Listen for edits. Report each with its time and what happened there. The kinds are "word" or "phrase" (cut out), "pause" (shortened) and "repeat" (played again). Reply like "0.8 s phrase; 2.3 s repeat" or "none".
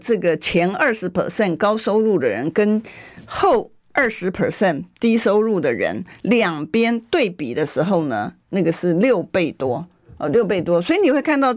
none